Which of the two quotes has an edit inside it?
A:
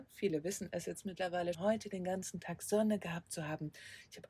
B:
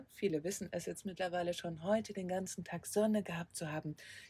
A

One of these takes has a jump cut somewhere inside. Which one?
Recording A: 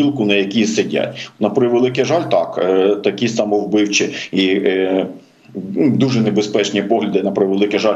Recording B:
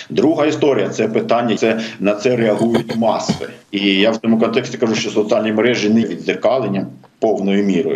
B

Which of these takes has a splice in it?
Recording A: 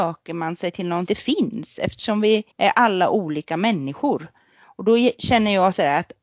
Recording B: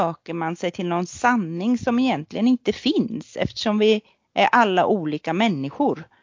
A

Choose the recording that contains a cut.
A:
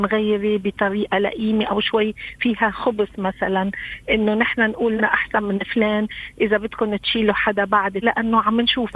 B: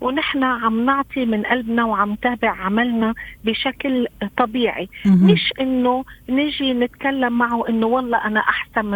A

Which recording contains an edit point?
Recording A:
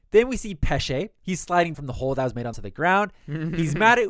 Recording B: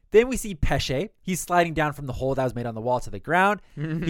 A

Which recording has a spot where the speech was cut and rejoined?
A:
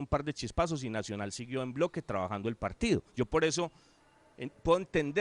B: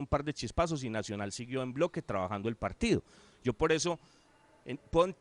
A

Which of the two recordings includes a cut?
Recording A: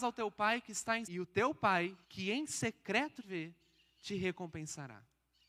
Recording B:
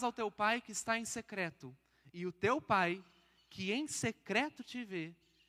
A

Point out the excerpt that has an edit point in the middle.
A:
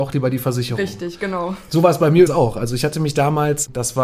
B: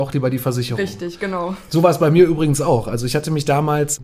A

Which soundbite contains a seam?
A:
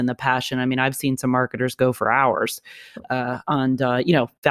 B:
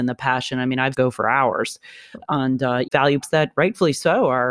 B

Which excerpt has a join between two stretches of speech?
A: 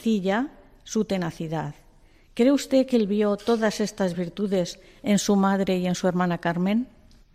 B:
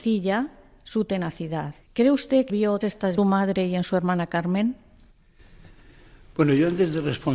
B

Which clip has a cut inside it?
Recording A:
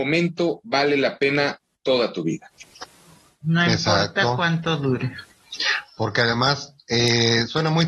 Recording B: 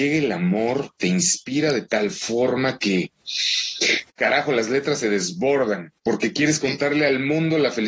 B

